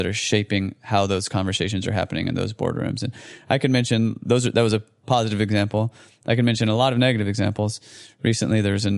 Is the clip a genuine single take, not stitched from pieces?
yes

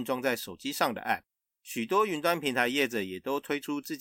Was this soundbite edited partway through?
no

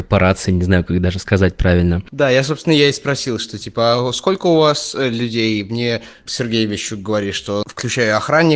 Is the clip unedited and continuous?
no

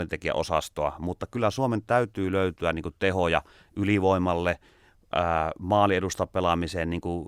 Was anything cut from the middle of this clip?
no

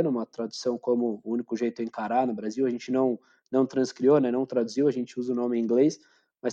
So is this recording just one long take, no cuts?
yes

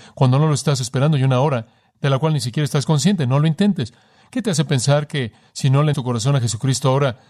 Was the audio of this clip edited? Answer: yes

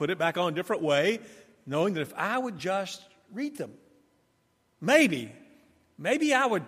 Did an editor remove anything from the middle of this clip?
no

